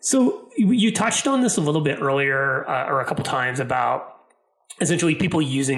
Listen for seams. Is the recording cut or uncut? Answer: uncut